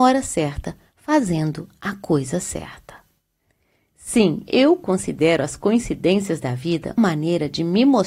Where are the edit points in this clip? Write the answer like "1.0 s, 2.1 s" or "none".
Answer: 7.0 s